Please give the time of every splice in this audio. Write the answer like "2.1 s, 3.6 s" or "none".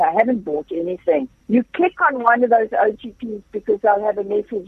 1.4 s